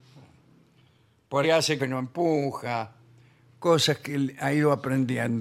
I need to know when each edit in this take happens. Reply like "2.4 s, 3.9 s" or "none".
1.4 s, 1.8 s